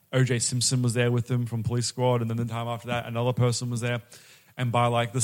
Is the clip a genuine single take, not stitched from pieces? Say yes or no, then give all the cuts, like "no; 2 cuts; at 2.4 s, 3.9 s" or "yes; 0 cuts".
yes; 0 cuts